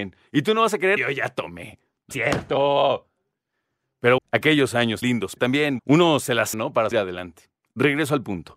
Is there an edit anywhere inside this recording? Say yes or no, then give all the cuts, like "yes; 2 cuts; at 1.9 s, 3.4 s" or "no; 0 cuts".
yes; 8 cuts; at 1.0 s, 2.1 s, 4.2 s, 5.0 s, 5.4 s, 5.8 s, 6.5 s, 6.9 s